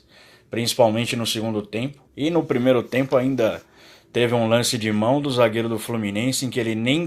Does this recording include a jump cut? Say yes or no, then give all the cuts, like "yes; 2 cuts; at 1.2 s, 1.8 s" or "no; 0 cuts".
yes; 1 cut; at 2.1 s